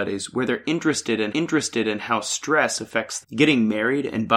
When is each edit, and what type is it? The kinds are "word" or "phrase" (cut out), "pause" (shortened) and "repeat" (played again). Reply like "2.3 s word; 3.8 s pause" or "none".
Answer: 1.3 s repeat; 3.2 s word